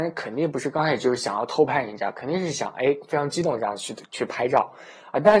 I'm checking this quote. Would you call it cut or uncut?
uncut